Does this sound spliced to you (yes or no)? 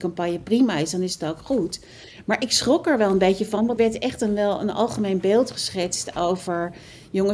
yes